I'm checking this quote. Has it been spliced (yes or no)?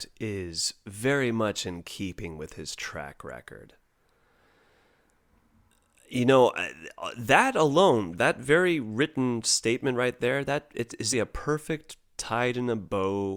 yes